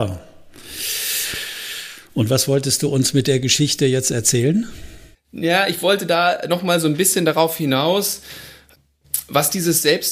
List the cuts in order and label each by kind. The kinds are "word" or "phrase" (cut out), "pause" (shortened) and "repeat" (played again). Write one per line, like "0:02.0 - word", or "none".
0:05.1 - pause